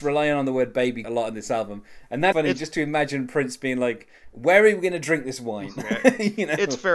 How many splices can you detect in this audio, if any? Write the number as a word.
two